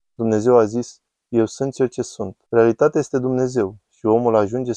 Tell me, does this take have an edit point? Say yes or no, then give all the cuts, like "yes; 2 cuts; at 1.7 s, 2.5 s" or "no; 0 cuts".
yes; 1 cut; at 2.5 s